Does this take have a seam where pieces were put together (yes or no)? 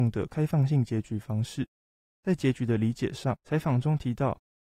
yes